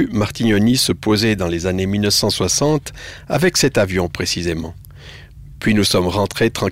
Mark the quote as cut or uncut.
uncut